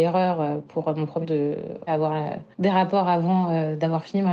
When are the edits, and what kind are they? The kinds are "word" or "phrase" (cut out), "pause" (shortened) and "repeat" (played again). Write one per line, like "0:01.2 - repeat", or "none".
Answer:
0:01.2 - word
0:01.9 - word
0:02.5 - pause

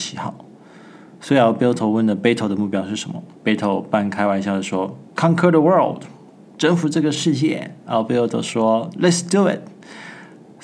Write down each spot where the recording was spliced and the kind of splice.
0:03.4 - pause
0:05.1 - pause

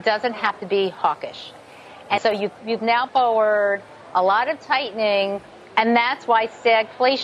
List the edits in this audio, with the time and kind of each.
0:02.2 - word
0:02.6 - word
0:03.1 - word

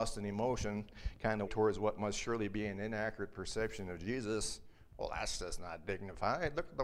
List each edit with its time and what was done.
0:01.5 - word

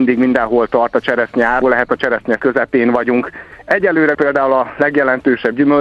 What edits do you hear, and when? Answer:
0:01.6 - word
0:02.4 - word
0:04.1 - word

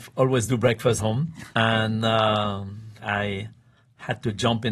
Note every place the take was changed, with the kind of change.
0:01.0 - word
0:01.5 - pause
0:03.0 - word

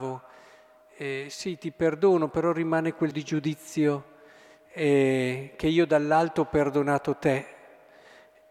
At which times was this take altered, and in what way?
0:03.1 - word

